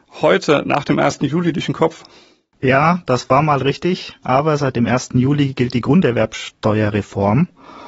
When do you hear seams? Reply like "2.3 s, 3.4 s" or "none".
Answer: none